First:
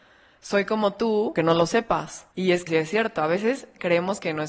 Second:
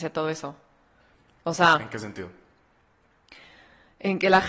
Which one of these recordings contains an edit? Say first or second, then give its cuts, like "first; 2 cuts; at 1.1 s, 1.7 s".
first; 3 cuts; at 1.4 s, 2.3 s, 2.7 s